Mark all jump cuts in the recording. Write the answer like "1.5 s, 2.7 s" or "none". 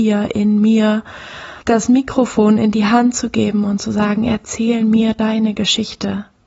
1.6 s